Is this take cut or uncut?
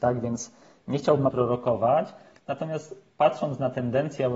cut